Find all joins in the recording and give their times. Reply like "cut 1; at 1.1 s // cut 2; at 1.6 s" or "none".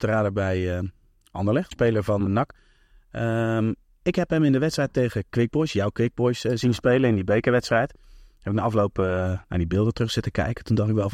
cut 1; at 1.7 s // cut 2; at 2.3 s